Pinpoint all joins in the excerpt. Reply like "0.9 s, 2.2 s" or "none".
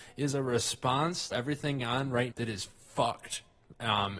1.3 s, 1.8 s, 2.3 s